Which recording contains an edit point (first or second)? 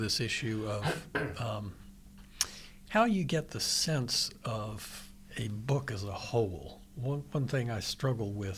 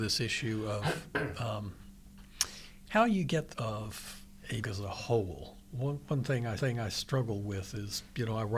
second